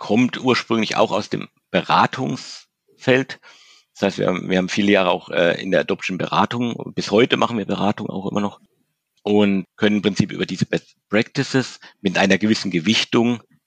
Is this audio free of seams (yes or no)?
yes